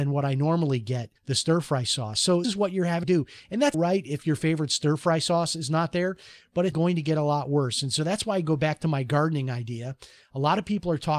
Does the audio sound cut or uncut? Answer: cut